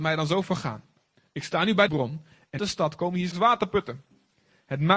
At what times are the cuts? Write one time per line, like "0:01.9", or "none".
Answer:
0:01.9
0:02.6
0:03.3